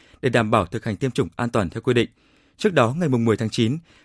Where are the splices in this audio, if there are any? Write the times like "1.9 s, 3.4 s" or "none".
none